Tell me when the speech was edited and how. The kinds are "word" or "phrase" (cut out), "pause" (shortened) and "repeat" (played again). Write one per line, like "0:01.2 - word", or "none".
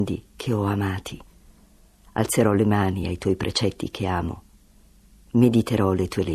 none